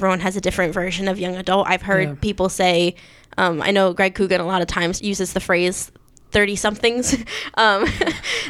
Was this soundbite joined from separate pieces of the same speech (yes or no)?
yes